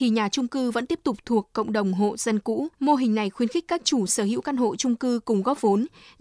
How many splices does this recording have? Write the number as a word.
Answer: one